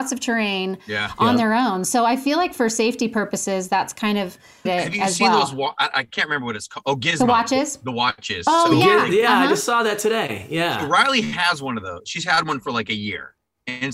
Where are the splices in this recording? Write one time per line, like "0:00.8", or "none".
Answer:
0:04.7